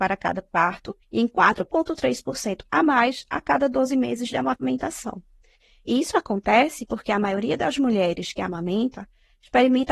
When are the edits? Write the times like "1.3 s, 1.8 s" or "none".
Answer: 1.0 s